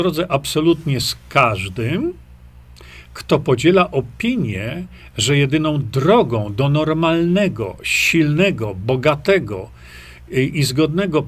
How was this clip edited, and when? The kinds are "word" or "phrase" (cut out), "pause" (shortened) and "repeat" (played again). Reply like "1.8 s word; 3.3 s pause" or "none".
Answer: none